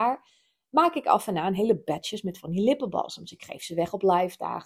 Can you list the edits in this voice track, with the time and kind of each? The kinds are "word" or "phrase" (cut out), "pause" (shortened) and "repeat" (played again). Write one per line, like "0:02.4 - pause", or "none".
none